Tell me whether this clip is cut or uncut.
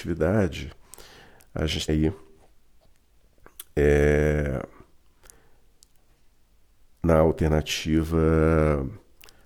cut